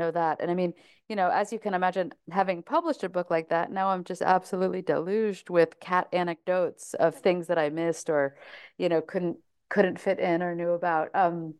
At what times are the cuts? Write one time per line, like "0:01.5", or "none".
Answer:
none